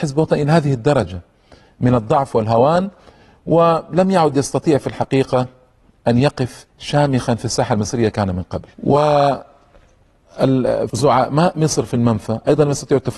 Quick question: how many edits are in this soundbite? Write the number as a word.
four